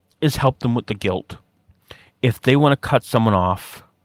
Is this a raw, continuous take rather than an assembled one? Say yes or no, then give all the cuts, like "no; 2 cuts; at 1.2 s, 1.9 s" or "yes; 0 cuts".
yes; 0 cuts